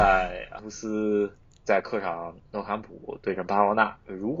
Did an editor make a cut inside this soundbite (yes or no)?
no